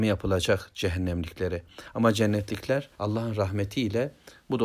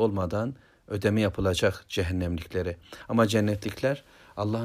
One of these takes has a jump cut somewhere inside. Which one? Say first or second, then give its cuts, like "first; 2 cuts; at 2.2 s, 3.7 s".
first; 1 cut; at 2.9 s